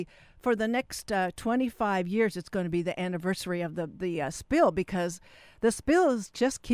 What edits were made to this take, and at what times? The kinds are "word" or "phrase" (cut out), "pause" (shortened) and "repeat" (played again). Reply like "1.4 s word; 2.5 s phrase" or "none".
none